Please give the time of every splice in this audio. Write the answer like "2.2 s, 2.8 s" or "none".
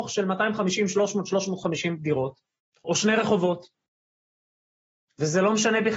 2.8 s